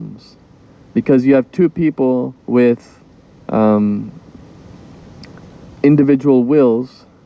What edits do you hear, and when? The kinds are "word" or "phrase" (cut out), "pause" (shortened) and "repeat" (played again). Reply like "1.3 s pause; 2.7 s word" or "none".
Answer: 2.4 s pause; 5.6 s pause